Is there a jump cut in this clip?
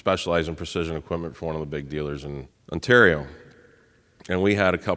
no; 0 cuts

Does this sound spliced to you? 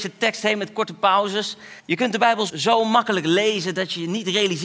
yes; 2 cuts; at 1.8 s, 2.5 s

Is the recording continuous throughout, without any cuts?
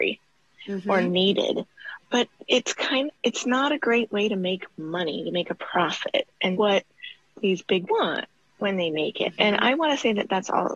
no; 3 cuts; at 3.1 s, 6.5 s, 7.9 s

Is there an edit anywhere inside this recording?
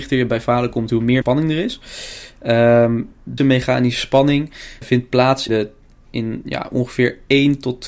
yes; 5 cuts; at 1.2 s, 3.4 s, 4.8 s, 5.5 s, 6.4 s

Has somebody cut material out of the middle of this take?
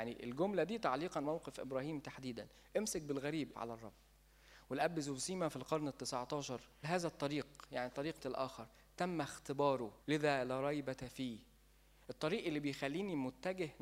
yes; 5 cuts; at 1.2 s, 3.5 s, 6.8 s, 8.2 s, 10.0 s

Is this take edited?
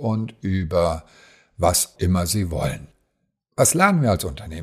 yes; 1 cut; at 2.0 s

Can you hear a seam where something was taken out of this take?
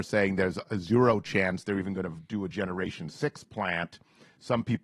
no; 0 cuts

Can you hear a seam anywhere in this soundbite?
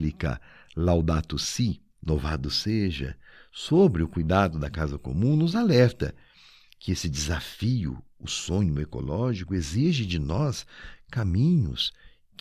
no; 0 cuts

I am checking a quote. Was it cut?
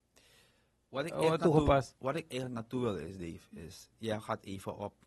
no; 0 cuts

